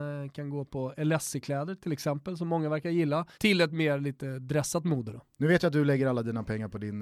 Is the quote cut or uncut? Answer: cut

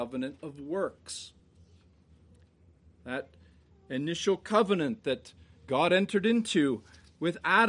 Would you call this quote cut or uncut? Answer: uncut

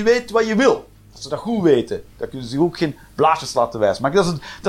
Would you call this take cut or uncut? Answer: uncut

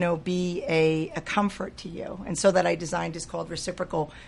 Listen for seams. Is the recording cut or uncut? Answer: cut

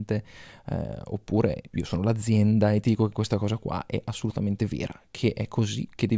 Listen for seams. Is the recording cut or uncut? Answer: uncut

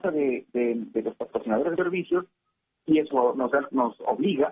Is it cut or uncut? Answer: cut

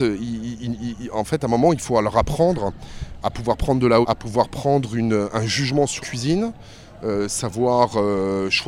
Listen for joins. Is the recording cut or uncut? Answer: cut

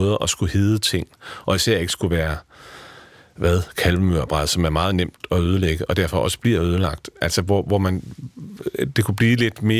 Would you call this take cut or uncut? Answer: uncut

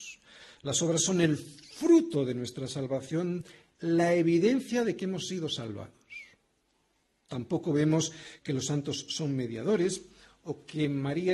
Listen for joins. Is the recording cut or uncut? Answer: uncut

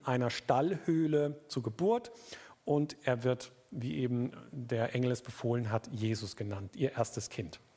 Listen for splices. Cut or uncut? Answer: uncut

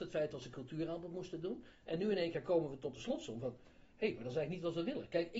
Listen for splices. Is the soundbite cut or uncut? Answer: uncut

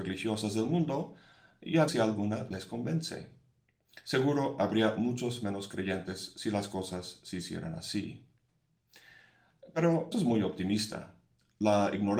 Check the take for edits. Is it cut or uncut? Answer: cut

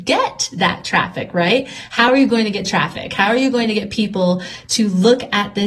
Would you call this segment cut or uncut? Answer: uncut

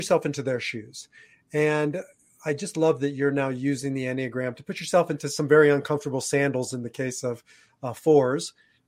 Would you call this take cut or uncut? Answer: uncut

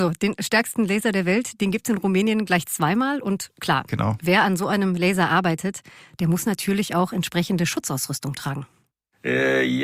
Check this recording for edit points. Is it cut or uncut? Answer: uncut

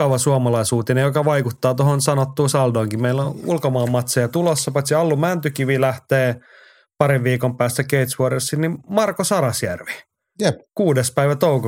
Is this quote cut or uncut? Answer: uncut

